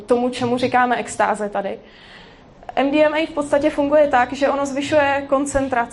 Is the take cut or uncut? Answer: uncut